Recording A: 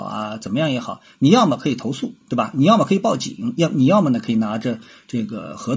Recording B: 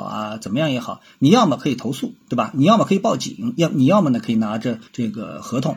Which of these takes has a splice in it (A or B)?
B